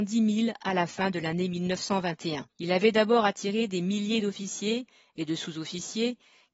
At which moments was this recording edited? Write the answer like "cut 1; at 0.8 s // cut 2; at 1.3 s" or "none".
cut 1; at 2.5 s